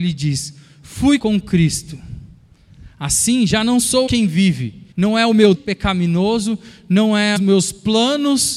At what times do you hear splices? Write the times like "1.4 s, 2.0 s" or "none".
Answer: 1.2 s, 4.1 s, 4.9 s, 5.5 s, 7.4 s